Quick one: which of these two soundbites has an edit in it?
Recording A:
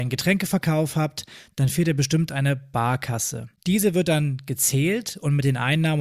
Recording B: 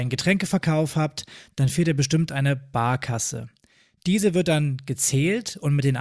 A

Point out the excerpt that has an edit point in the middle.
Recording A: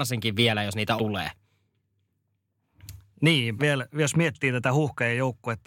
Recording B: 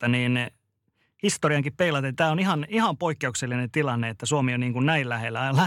A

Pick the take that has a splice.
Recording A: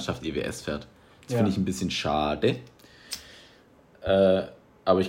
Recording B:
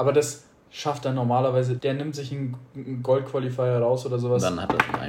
B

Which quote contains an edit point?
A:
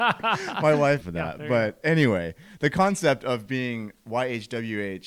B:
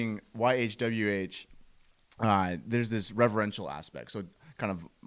A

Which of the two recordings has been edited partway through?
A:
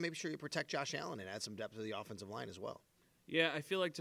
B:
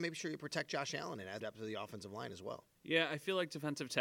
B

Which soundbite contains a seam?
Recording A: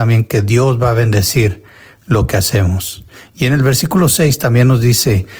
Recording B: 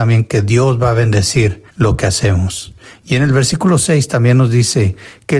B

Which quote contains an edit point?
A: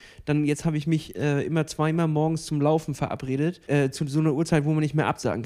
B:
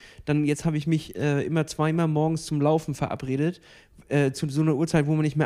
A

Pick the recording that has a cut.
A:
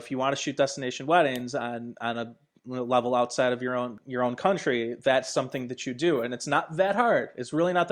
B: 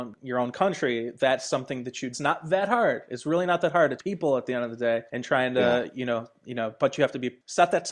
B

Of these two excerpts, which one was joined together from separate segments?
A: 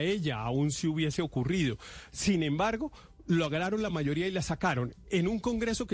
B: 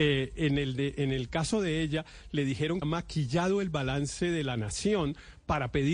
B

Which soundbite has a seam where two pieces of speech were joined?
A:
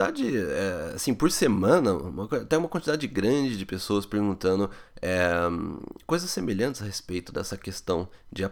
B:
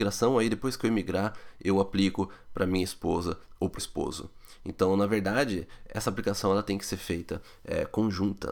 B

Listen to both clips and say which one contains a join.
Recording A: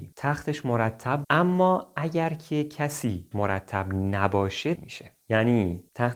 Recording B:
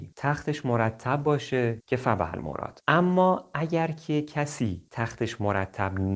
A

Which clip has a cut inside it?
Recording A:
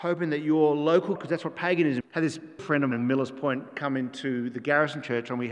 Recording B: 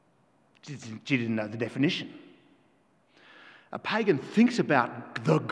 A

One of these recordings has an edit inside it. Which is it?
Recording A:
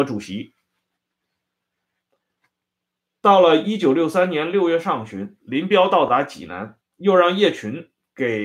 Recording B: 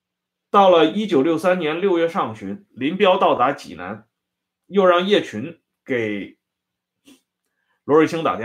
A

